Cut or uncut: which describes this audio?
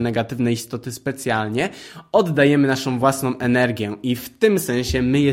uncut